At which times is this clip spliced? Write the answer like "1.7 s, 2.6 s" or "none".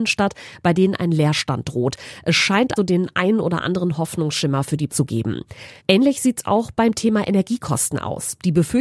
2.8 s, 4.9 s, 5.8 s